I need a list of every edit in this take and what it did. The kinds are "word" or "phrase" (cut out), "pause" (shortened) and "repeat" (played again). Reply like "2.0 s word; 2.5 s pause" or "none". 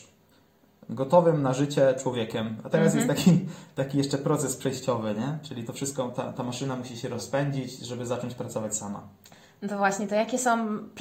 none